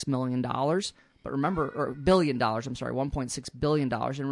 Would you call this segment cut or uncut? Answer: uncut